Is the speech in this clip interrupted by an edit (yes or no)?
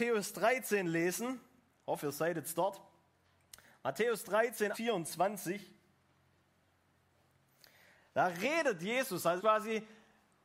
yes